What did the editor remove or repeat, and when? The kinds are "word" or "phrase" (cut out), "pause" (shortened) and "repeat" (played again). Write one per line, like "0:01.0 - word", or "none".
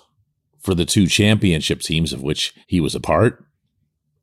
0:02.6 - pause
0:03.0 - word